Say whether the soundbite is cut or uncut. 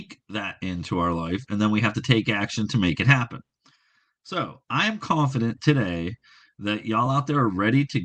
uncut